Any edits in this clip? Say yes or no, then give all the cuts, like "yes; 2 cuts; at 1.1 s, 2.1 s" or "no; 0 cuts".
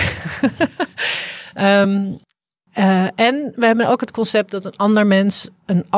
no; 0 cuts